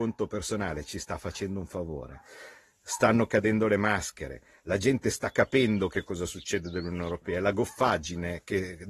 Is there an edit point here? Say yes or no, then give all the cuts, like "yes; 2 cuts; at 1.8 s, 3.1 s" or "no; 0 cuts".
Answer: no; 0 cuts